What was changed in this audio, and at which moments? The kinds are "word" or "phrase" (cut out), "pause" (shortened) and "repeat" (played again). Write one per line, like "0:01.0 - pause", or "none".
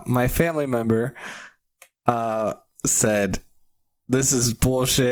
none